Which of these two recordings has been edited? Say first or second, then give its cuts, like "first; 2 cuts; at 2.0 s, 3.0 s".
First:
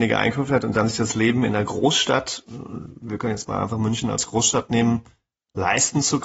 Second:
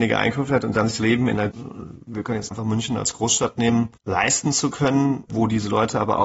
second; 5 cuts; at 1.0 s, 1.5 s, 2.5 s, 4.0 s, 5.3 s